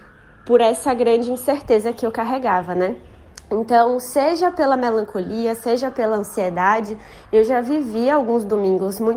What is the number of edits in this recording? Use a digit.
0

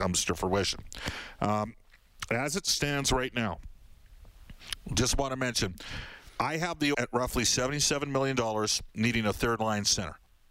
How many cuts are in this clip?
1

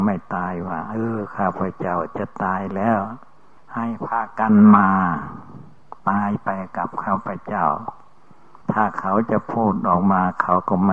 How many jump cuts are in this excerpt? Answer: 3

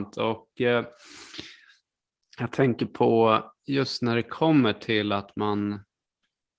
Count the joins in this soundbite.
0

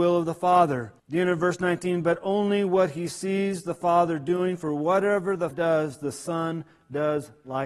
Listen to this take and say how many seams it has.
2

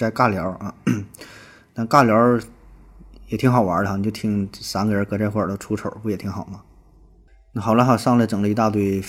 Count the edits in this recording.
0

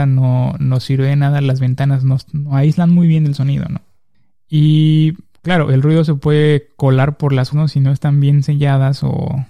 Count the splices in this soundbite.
1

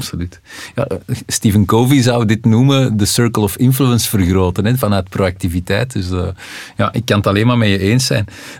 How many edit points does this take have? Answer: 0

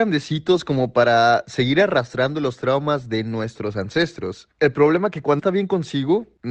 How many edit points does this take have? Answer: 1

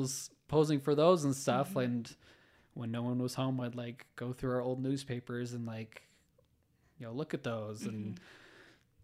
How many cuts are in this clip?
0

